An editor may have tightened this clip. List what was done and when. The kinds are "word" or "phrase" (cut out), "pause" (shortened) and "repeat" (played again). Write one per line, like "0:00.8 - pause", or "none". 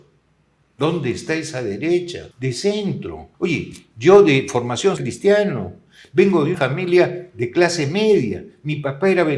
0:02.3 - pause
0:03.3 - pause
0:05.0 - phrase
0:06.5 - word

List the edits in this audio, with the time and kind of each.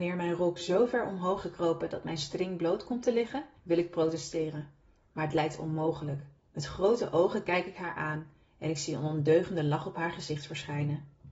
0:01.4 - word
0:03.6 - pause
0:06.4 - pause

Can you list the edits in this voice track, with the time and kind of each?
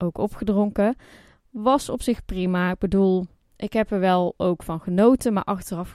none

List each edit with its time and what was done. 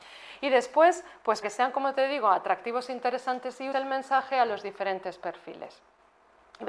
0:01.4 - word
0:03.7 - phrase

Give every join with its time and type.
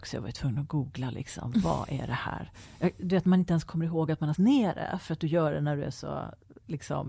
0:04.3 - word

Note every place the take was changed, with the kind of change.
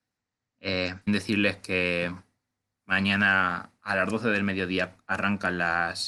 0:01.1 - word

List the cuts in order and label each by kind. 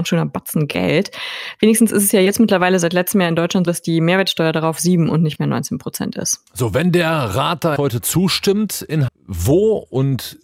0:03.7 - word
0:07.8 - word
0:09.1 - word

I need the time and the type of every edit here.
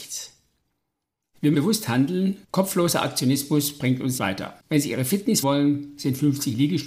0:01.5 - word
0:02.4 - pause
0:04.2 - word
0:04.6 - pause
0:05.4 - word

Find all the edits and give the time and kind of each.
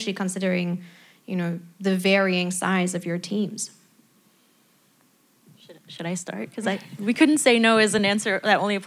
none

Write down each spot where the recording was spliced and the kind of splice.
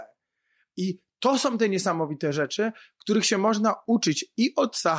none

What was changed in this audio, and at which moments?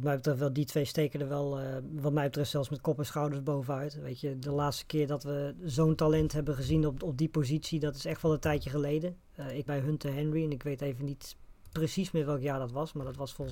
0:09.7 - phrase

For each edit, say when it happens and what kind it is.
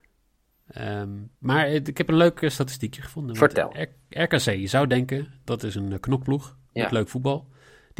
0:01.3 - pause
0:06.7 - pause

